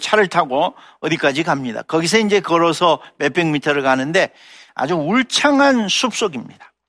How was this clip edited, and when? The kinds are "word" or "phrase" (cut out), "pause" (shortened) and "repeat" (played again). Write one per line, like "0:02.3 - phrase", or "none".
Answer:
none